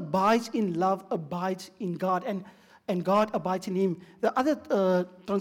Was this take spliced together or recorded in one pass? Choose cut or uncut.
uncut